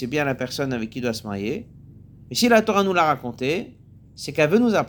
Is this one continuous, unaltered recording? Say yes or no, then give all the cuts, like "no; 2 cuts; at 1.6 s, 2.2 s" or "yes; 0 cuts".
no; 1 cut; at 2.3 s